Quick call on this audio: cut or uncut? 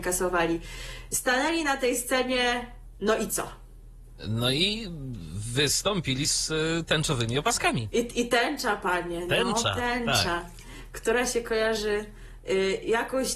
uncut